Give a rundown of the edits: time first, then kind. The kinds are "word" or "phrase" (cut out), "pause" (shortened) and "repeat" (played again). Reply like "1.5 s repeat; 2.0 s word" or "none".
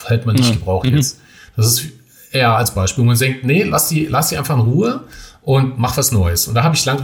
none